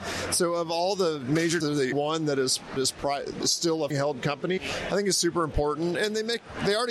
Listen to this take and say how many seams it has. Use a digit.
6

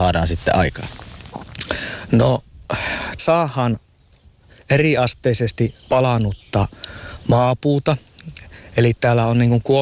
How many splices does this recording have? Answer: 2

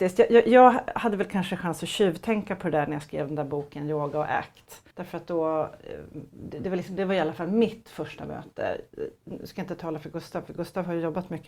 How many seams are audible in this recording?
1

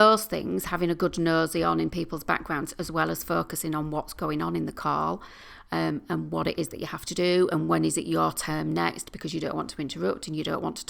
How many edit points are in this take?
0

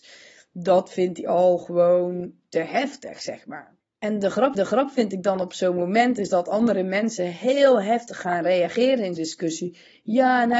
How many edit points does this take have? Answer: 3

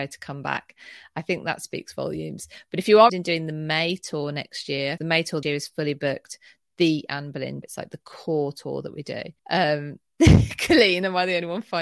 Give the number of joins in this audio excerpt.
5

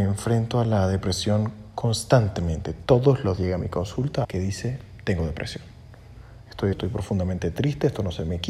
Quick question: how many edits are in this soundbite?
3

